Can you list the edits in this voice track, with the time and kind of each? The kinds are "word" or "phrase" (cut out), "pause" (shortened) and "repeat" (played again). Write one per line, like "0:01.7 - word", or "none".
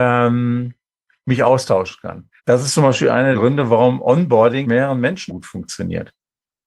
0:02.4 - pause
0:03.3 - word
0:04.6 - word
0:05.3 - word